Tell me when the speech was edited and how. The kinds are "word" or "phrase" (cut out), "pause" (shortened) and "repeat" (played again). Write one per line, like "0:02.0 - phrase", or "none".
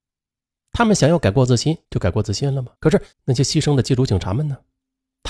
0:01.8 - pause
0:02.8 - pause
0:03.1 - pause